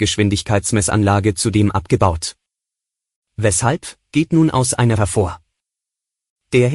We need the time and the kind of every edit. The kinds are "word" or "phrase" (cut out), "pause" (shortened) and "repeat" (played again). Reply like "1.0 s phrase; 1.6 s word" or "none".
5.0 s word

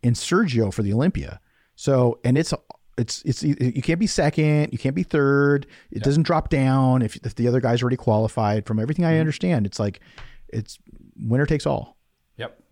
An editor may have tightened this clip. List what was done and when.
none

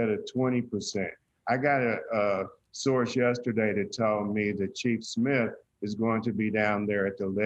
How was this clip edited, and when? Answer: none

